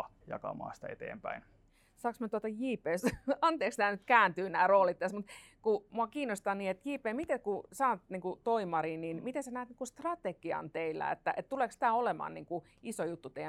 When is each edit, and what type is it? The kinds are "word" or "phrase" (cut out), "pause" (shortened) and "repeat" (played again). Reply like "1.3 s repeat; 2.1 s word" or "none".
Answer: none